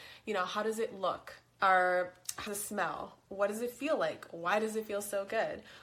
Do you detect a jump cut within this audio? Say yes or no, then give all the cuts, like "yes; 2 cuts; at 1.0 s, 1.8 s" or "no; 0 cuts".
yes; 1 cut; at 2.5 s